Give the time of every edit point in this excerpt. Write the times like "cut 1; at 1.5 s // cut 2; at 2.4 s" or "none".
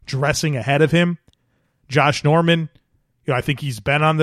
none